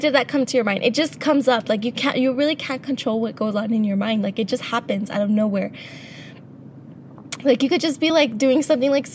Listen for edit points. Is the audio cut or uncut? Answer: uncut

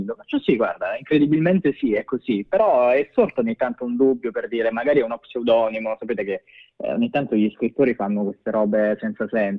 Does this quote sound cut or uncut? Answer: uncut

